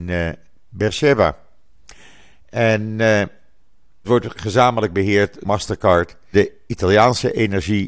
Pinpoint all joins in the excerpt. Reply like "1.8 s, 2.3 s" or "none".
4.0 s, 5.4 s, 6.3 s